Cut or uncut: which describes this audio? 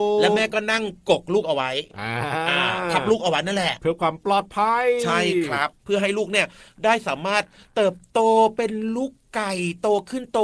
uncut